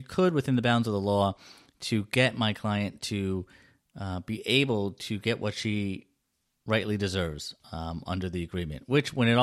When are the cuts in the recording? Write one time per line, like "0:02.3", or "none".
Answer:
none

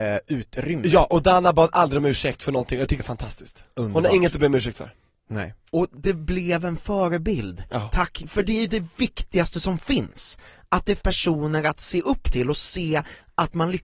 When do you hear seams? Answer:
0:03.0
0:08.2
0:11.0

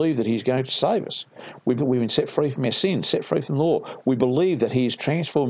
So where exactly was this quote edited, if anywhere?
0:01.8

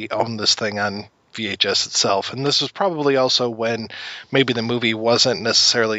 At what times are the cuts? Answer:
none

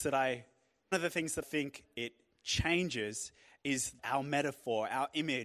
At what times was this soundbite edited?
0:00.9
0:01.4
0:04.0

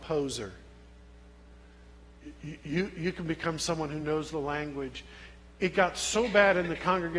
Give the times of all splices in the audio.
none

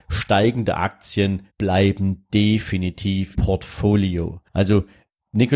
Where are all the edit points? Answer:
0:01.5
0:03.3
0:04.5

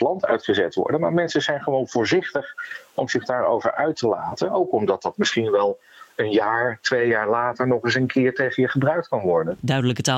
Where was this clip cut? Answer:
none

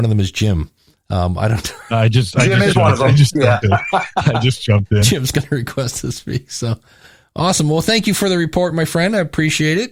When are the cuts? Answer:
none

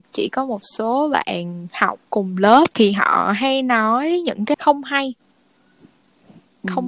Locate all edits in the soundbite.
0:02.1
0:02.7
0:04.5

